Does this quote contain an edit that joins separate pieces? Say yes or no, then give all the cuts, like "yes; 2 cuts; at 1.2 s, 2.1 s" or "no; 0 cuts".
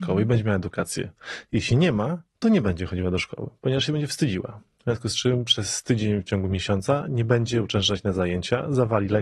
no; 0 cuts